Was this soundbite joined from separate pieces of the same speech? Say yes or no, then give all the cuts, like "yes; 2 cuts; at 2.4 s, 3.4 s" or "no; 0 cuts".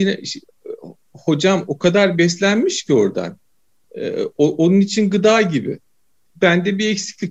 no; 0 cuts